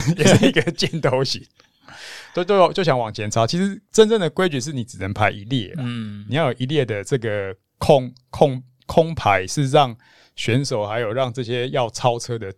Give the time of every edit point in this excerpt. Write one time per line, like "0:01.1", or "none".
none